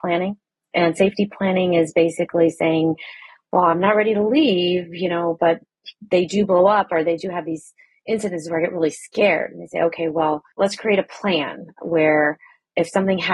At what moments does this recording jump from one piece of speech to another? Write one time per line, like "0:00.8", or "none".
0:10.5